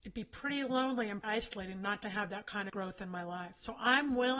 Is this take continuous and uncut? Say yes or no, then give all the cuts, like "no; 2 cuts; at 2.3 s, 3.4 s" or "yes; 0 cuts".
no; 2 cuts; at 1.2 s, 2.7 s